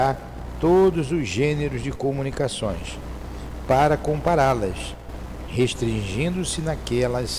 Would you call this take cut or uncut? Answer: uncut